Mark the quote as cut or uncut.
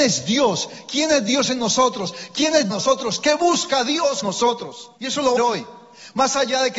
cut